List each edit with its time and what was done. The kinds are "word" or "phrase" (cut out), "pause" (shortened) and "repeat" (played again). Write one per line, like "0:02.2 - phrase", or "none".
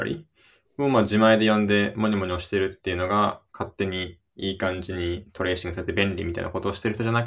0:03.5 - pause
0:04.3 - pause